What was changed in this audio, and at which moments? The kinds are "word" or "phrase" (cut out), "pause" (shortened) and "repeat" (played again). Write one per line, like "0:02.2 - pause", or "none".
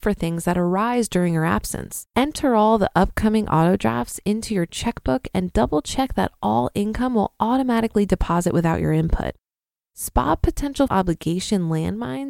0:02.1 - pause
0:10.9 - word

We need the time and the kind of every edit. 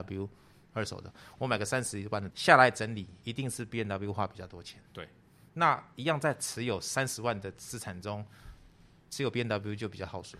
0:02.3 - word

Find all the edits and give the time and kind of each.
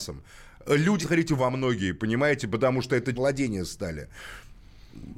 0:01.0 - phrase
0:01.4 - word
0:03.1 - word

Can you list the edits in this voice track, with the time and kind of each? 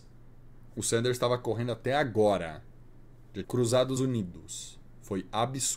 0:03.4 - word
0:04.0 - word

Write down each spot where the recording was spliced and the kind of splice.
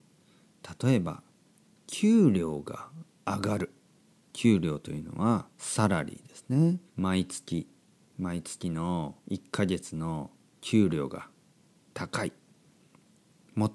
0:05.5 - pause
0:06.9 - pause
0:09.2 - pause

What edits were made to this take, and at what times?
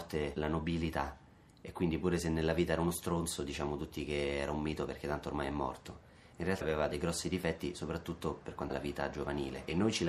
0:06.6 - word
0:08.7 - word

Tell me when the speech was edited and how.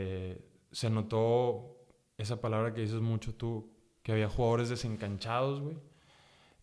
none

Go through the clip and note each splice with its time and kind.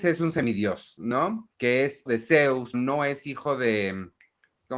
0:01.5 - pause
0:02.1 - word
0:02.7 - word

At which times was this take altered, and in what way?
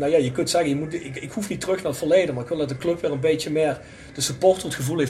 none

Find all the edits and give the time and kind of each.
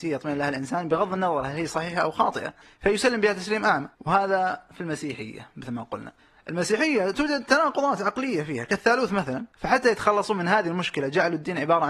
0:02.6 - pause
0:03.9 - pause
0:06.2 - pause
0:09.5 - pause

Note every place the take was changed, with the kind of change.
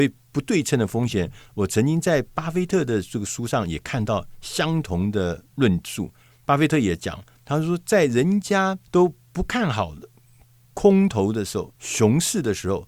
0:06.2 - pause
0:08.8 - pause
0:11.8 - pause

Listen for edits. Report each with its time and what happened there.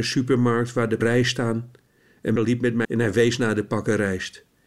0:01.0 - word
0:02.4 - word
0:02.8 - word

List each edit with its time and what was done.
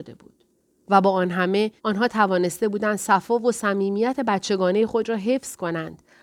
0:01.8 - pause

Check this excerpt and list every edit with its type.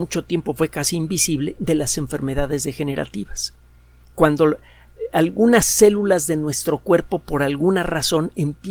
none

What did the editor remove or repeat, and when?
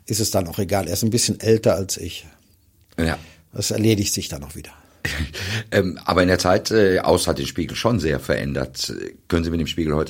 none

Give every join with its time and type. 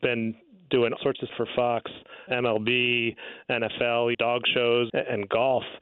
0:01.0 - word
0:01.3 - word
0:02.3 - word
0:04.1 - word
0:04.9 - word

